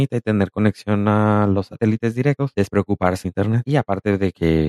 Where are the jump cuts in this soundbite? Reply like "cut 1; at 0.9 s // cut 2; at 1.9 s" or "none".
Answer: cut 1; at 2.5 s // cut 2; at 3.2 s